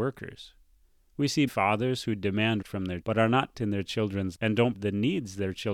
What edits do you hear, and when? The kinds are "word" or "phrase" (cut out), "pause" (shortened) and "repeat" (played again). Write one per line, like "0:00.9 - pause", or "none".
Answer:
0:01.5 - word
0:02.6 - word
0:03.0 - word
0:03.5 - word
0:04.3 - word
0:04.7 - word